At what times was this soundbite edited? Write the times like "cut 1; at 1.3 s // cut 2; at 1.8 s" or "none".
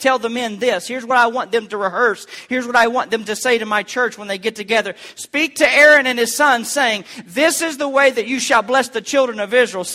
none